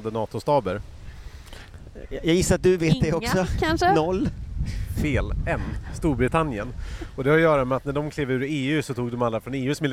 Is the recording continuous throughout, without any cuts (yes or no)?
yes